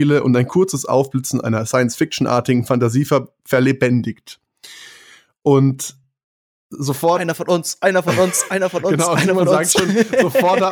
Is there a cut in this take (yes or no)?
no